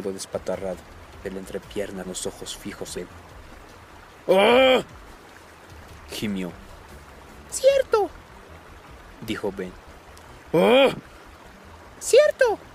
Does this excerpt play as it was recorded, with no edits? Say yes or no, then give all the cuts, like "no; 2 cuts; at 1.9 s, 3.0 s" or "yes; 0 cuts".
no; 3 cuts; at 1.2 s, 2.0 s, 2.9 s